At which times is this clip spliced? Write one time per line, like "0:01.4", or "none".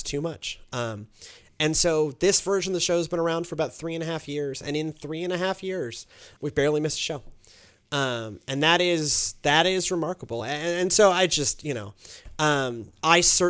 0:06.4